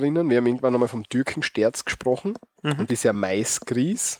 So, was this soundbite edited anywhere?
yes; 1 cut; at 2.9 s

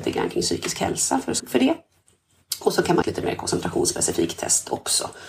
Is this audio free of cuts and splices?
no; 2 cuts; at 1.4 s, 3.0 s

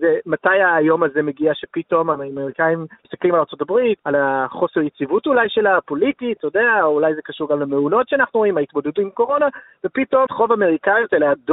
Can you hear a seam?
yes; 3 cuts; at 3.0 s, 4.0 s, 10.3 s

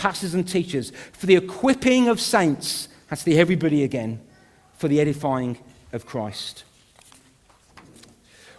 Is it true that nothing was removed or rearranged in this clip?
yes; 0 cuts

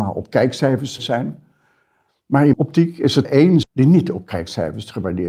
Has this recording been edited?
yes; 4 cuts; at 1.0 s, 2.5 s, 3.2 s, 3.6 s

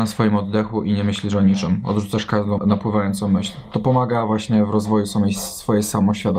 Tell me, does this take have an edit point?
yes; 1 cut; at 2.6 s

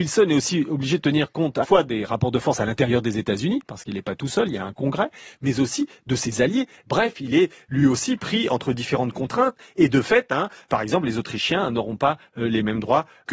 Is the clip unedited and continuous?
no; 1 cut; at 1.6 s

